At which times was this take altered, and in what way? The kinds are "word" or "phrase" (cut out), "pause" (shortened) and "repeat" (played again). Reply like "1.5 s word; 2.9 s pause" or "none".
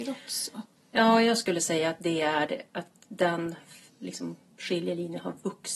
none

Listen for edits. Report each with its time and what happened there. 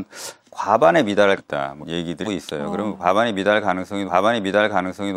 1.4 s word; 1.8 s word; 2.2 s word; 4.1 s repeat

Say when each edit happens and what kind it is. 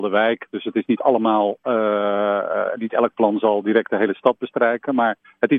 none

